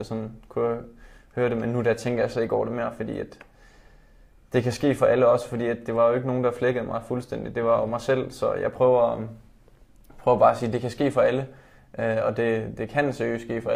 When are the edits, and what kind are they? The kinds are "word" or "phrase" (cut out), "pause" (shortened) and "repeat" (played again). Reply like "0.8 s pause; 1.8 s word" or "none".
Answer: none